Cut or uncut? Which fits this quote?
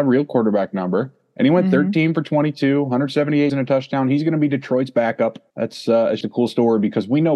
cut